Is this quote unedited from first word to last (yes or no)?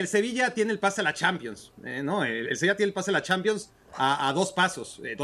yes